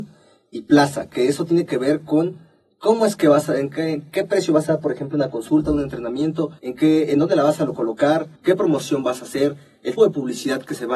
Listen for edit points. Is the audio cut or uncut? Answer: cut